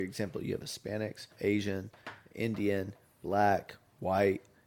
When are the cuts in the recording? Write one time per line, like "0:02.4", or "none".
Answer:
0:01.3